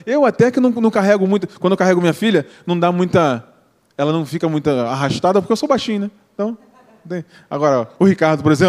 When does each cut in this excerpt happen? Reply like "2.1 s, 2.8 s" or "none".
none